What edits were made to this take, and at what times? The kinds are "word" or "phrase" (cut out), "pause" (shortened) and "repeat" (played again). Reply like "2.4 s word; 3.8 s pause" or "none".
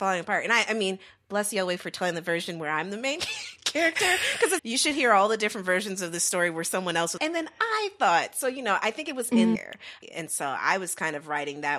4.6 s word; 7.2 s word; 9.6 s word